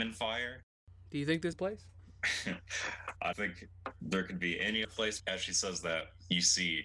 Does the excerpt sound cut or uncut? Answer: cut